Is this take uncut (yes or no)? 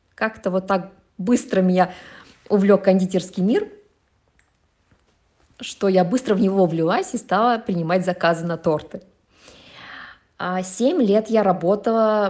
yes